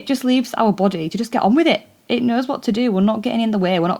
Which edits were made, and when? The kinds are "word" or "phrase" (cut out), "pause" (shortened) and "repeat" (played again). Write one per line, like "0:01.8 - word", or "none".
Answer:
none